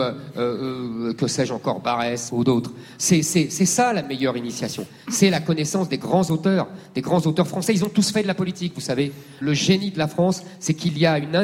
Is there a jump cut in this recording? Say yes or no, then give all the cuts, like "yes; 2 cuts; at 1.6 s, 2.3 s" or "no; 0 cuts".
yes; 2 cuts; at 2.3 s, 9.4 s